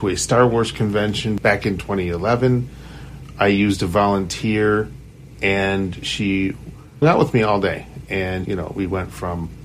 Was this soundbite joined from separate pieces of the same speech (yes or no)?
yes